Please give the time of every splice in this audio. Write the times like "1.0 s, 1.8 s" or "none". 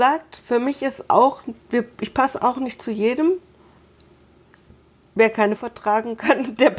5.6 s

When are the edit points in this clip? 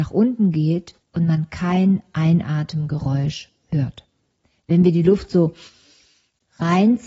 1.0 s

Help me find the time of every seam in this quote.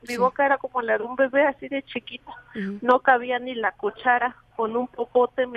none

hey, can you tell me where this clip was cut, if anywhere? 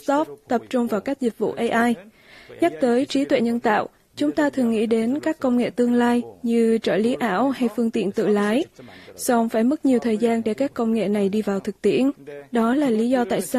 none

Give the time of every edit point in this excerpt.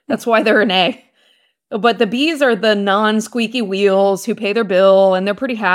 none

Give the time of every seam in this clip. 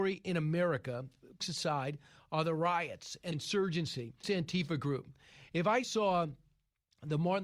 1.4 s, 3.3 s, 4.2 s, 5.8 s

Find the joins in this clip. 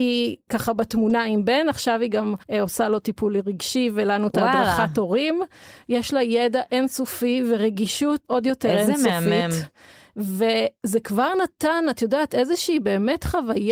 2.4 s, 8.3 s

